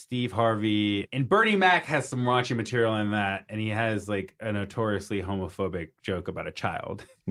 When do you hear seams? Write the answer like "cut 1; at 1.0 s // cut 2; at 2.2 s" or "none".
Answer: none

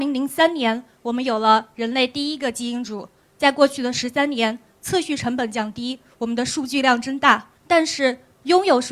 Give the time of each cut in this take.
cut 1; at 7.5 s

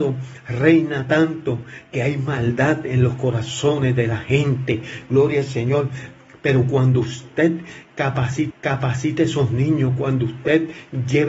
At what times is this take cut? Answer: cut 1; at 8.5 s

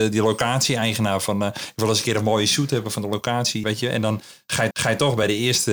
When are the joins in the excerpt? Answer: cut 1; at 3.6 s // cut 2; at 4.7 s

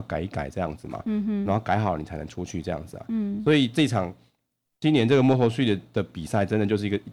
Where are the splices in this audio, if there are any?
none

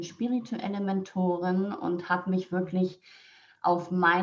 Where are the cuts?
none

